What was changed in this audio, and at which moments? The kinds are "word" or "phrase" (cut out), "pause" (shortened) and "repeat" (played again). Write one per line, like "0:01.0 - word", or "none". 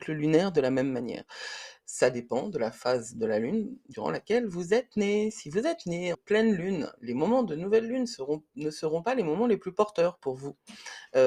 0:06.1 - phrase